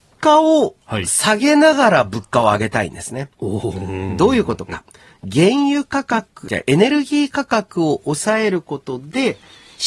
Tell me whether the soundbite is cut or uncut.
cut